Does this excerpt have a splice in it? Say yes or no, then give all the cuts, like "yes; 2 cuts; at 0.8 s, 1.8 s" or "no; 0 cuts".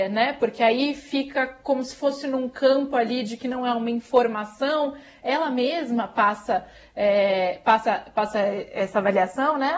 no; 0 cuts